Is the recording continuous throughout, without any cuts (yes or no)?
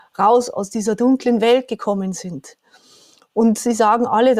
yes